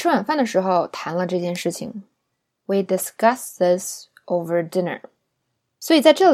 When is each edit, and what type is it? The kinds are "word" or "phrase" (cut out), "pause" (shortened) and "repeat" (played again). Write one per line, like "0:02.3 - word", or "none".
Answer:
none